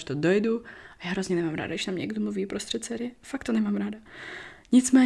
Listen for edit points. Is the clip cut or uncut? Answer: uncut